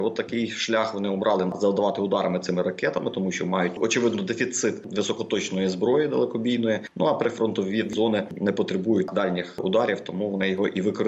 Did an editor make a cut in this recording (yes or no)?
no